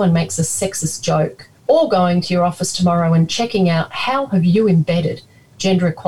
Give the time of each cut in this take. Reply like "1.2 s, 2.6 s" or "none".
1.6 s

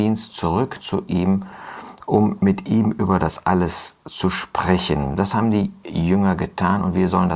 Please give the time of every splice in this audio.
none

